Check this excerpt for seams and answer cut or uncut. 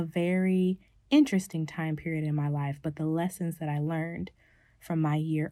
uncut